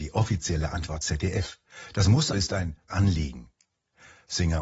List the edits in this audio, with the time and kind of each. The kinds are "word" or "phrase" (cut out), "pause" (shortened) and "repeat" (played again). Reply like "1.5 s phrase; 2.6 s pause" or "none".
1.0 s word; 2.3 s word; 2.9 s word